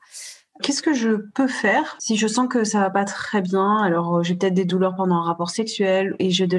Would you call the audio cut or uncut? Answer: uncut